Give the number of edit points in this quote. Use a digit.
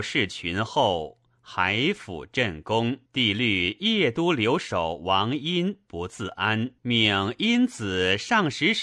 2